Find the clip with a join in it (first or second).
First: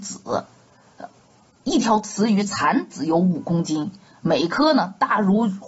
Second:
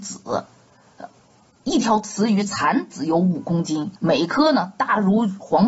second